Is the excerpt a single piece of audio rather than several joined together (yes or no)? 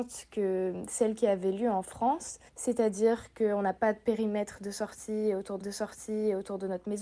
no